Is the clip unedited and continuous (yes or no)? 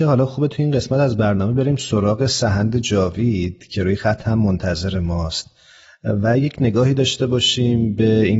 yes